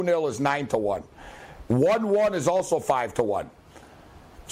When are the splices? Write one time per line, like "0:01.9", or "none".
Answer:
none